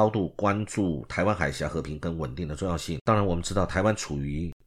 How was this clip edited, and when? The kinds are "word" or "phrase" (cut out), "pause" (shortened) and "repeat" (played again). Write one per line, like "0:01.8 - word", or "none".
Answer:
0:03.0 - pause